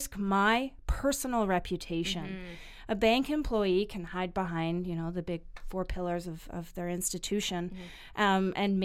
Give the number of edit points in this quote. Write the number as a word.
zero